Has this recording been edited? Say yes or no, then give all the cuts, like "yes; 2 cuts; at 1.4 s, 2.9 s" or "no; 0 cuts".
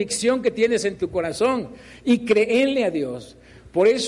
no; 0 cuts